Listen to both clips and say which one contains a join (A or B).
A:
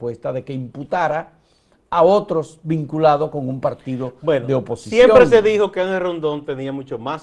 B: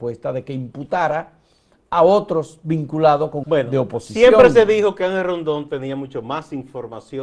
B